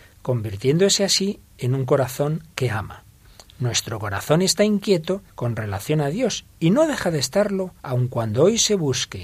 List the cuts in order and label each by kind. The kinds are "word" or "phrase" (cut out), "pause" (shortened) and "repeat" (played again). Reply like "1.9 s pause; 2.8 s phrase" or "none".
5.3 s pause; 7.8 s pause